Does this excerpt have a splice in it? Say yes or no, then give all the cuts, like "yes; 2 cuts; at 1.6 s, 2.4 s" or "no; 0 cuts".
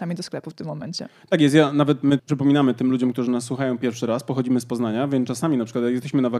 yes; 1 cut; at 2.2 s